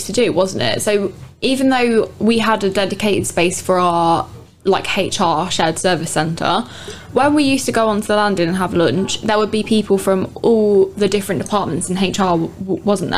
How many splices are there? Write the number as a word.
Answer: zero